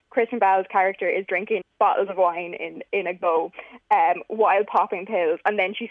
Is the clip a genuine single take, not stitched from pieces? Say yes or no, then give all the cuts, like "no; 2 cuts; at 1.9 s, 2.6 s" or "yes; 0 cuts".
no; 1 cut; at 1.6 s